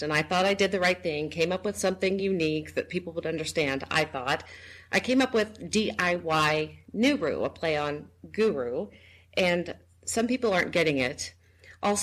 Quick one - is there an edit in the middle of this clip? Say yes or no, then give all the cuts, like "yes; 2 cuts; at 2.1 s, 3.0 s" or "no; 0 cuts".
no; 0 cuts